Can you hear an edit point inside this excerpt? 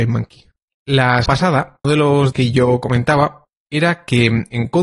yes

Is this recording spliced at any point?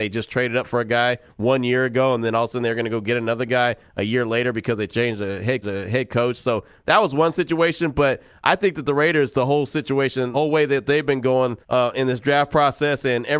yes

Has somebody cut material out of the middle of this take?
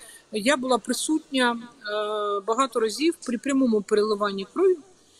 no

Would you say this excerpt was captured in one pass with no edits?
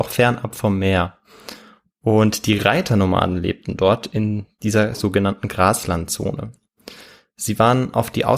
yes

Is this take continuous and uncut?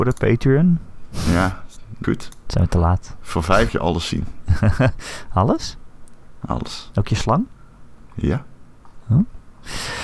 no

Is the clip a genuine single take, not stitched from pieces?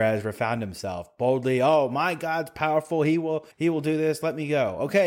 no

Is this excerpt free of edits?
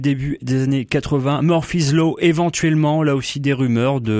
yes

